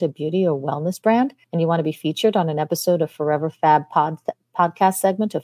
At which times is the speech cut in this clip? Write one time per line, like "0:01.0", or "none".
0:01.4